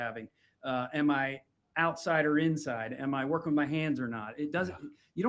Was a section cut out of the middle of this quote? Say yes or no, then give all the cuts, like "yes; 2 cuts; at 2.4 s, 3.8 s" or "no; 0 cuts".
no; 0 cuts